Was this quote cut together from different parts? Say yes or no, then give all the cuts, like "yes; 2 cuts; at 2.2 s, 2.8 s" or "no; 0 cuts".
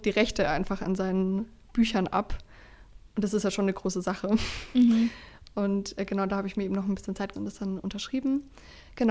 yes; 1 cut; at 7.3 s